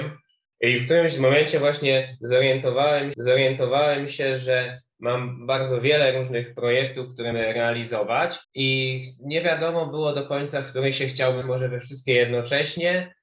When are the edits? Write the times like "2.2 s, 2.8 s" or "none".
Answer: 3.1 s, 7.3 s, 8.4 s, 11.4 s